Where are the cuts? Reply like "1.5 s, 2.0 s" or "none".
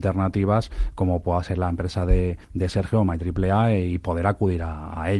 2.4 s